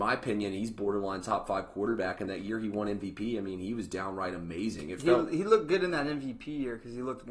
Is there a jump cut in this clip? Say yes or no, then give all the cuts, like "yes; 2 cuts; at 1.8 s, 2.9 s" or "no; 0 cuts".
no; 0 cuts